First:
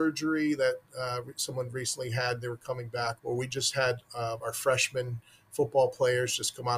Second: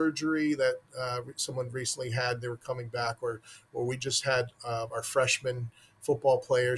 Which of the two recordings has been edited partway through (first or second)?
first